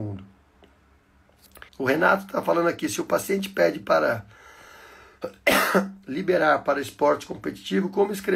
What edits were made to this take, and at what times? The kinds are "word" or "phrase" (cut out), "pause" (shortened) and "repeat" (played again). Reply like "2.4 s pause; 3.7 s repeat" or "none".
1.7 s pause

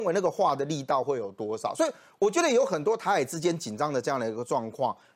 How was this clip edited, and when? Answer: none

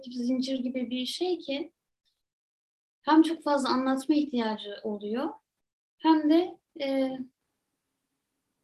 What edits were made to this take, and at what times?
none

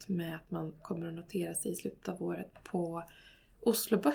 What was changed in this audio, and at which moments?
none

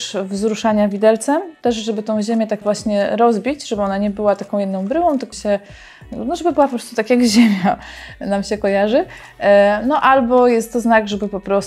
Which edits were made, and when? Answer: 2.6 s word; 5.3 s word

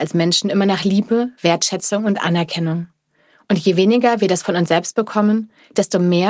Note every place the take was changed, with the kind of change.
none

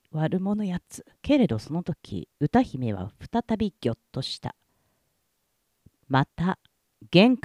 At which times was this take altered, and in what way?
1.1 s pause; 2.3 s pause

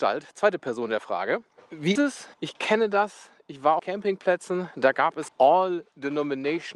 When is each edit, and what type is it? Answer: 2.0 s word; 2.3 s pause; 3.8 s phrase; 5.3 s word

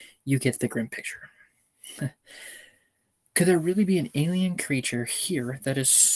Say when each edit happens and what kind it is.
none

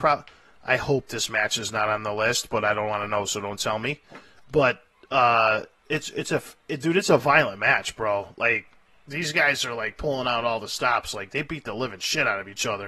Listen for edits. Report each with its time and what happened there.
none

